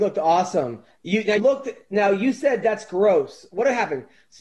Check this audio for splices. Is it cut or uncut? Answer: cut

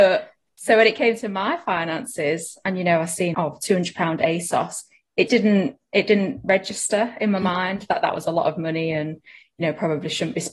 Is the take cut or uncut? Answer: cut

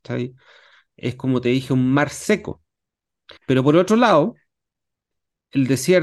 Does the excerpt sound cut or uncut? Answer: cut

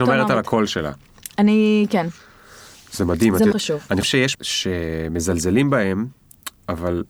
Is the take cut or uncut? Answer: cut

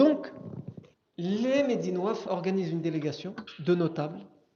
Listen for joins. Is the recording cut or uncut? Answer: cut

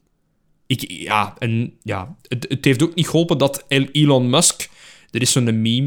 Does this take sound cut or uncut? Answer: uncut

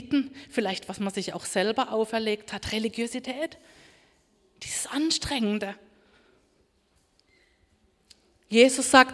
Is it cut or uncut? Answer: uncut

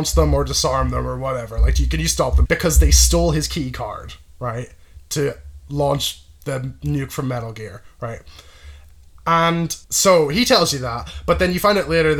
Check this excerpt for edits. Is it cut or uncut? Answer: cut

